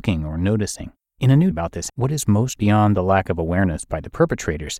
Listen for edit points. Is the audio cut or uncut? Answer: cut